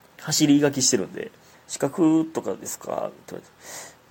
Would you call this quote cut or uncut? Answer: cut